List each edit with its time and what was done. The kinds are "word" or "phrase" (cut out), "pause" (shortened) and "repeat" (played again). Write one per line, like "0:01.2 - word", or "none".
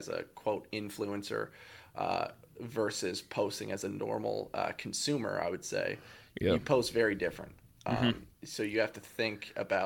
none